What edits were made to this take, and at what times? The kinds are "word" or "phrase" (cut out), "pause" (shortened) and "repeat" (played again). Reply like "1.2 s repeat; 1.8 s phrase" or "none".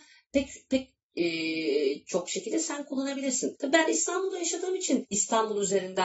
none